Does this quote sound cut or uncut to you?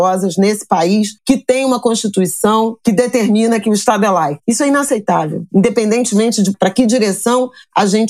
cut